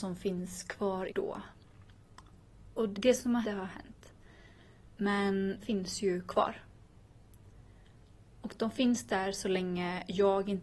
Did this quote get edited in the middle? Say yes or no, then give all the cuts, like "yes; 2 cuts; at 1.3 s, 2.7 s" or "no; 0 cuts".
yes; 4 cuts; at 1.1 s, 2.9 s, 3.4 s, 5.6 s